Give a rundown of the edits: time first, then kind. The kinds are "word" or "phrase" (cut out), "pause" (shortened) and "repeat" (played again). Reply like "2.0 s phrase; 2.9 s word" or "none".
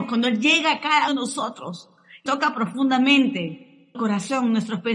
1.1 s word; 2.3 s word; 3.9 s word